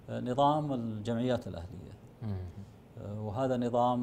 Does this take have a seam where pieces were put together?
yes; 1 cut; at 1.4 s

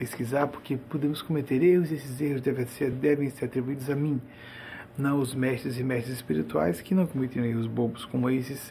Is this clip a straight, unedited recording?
yes; 0 cuts

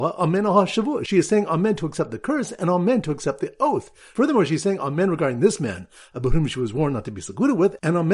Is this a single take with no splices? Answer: yes; 0 cuts

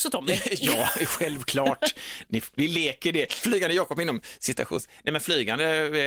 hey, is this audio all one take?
yes; 0 cuts

